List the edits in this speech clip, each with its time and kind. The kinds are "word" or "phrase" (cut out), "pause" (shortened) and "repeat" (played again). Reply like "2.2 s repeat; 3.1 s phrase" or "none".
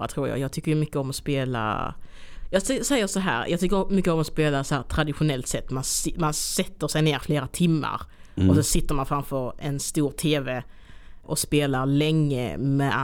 11.2 s word